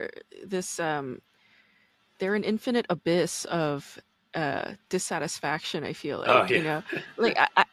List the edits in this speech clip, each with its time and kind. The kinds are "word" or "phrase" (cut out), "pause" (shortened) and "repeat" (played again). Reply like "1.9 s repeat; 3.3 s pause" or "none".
none